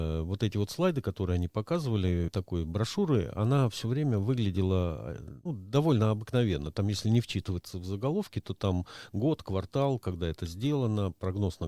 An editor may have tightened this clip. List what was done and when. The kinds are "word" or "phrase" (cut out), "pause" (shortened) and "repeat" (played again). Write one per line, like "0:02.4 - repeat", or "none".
0:02.3 - phrase
0:05.5 - word